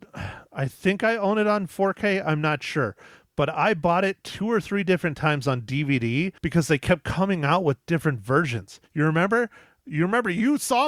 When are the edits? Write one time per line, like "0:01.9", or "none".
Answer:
0:06.4
0:08.9